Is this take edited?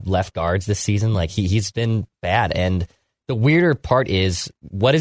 yes; 1 cut; at 1.7 s

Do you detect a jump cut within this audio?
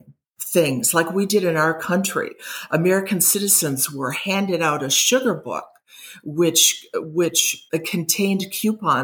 yes; 1 cut; at 7.7 s

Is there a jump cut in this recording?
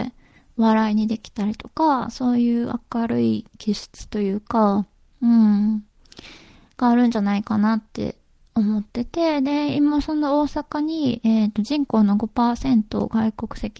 no; 0 cuts

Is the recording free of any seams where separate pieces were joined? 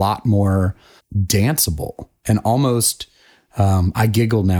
no; 1 cut; at 1.0 s

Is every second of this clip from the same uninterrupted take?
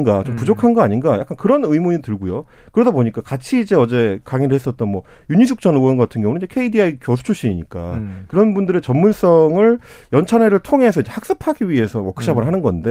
yes; 0 cuts

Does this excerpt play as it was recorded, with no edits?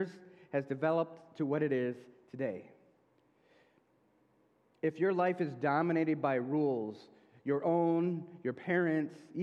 yes; 0 cuts

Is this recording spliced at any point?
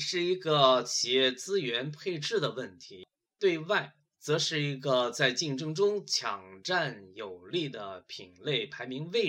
no; 0 cuts

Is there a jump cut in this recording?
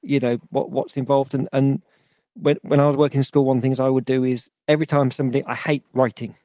no; 0 cuts

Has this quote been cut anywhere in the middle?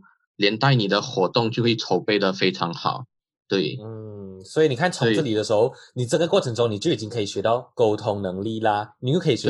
no; 0 cuts

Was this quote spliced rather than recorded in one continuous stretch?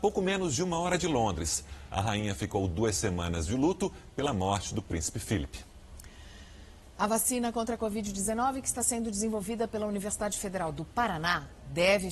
no; 0 cuts

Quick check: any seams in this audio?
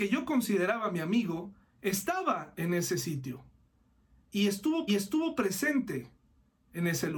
yes; 1 cut; at 4.9 s

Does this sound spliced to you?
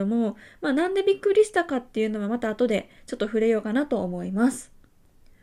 no; 0 cuts

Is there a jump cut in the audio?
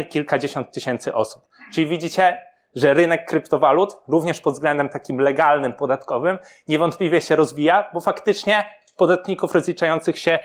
no; 0 cuts

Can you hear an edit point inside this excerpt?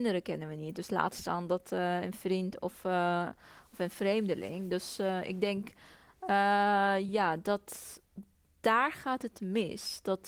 no; 0 cuts

